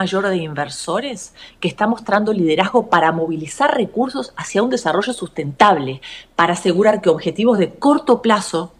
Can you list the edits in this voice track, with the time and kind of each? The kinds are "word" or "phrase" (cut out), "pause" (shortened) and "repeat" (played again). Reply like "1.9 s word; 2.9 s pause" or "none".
none